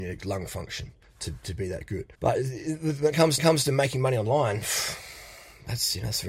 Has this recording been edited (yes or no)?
yes